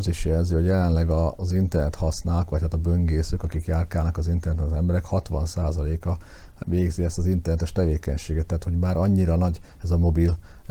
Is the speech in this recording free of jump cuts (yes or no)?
no